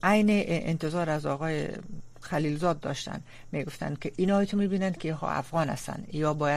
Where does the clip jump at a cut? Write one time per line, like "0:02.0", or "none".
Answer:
none